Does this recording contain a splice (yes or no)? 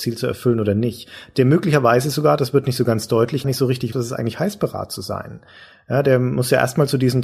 yes